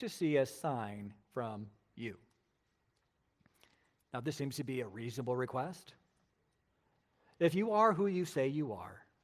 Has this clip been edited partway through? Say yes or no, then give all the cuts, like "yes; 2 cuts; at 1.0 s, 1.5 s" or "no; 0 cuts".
no; 0 cuts